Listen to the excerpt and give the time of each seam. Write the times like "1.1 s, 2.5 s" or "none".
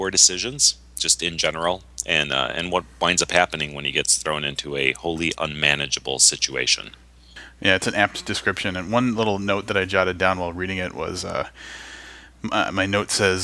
none